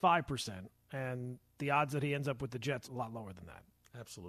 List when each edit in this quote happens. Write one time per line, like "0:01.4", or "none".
0:02.8